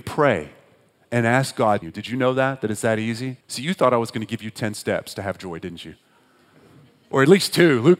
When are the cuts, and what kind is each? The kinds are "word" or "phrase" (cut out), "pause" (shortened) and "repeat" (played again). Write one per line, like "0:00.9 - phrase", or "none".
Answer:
0:01.8 - phrase
0:03.4 - pause

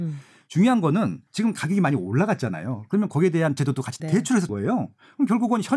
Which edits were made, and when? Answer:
0:01.3 - pause
0:03.6 - word
0:04.0 - phrase
0:04.5 - word

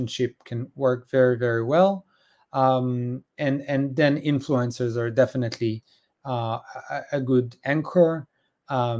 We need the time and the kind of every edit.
none

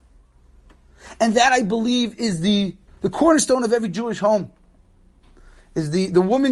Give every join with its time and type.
0:02.9 - pause

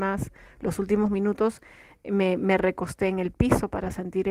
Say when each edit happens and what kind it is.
none

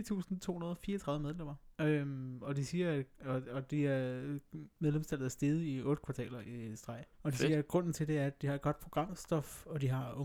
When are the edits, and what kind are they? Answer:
0:01.7 - pause
0:07.1 - pause

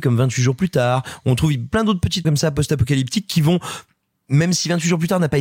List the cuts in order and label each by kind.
0:02.2 - word

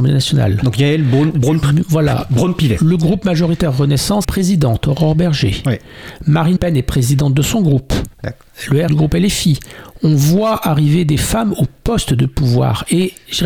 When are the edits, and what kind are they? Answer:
0:04.2 - phrase
0:06.6 - word
0:08.1 - pause
0:08.9 - phrase

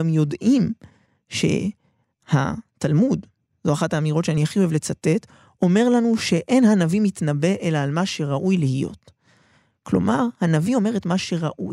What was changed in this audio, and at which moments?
none

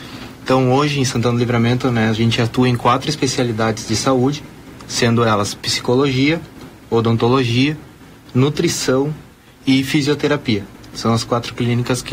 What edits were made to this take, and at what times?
none

